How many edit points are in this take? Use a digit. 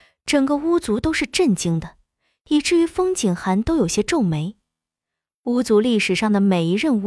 0